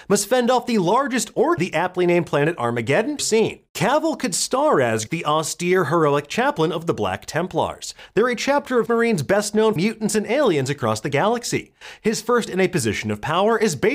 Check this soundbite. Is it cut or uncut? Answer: cut